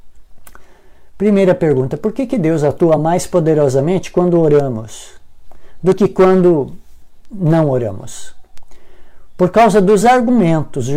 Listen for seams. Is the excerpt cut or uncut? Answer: uncut